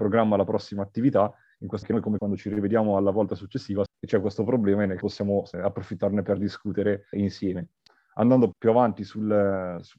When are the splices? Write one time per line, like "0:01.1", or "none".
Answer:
0:01.8
0:02.2
0:03.9
0:05.0
0:05.5
0:07.1
0:08.5